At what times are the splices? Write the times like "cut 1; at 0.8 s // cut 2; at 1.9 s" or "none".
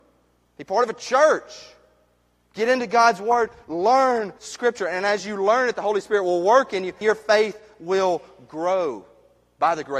cut 1; at 4.4 s // cut 2; at 7.0 s

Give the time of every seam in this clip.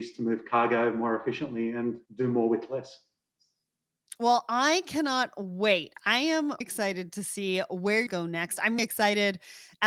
cut 1; at 2.1 s // cut 2; at 6.6 s // cut 3; at 8.1 s // cut 4; at 8.8 s

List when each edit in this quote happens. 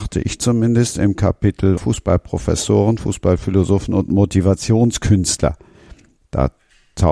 cut 1; at 1.8 s

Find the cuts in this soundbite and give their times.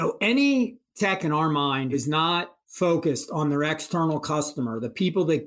cut 1; at 1.2 s // cut 2; at 1.9 s // cut 3; at 2.6 s

